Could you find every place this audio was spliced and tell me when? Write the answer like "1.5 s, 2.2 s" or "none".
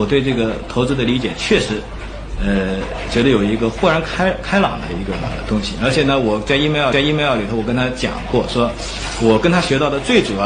6.9 s